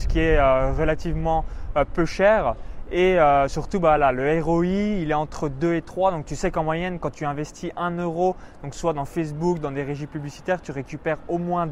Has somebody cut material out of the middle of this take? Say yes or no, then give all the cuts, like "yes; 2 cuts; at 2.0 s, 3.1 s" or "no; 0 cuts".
no; 0 cuts